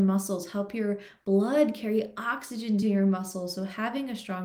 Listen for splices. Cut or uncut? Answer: uncut